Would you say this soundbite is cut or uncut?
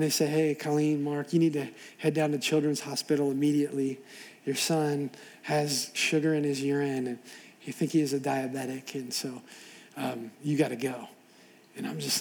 uncut